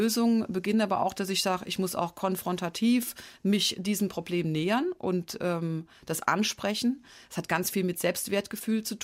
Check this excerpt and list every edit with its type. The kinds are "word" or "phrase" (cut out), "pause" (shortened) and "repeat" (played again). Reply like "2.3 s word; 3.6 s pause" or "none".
none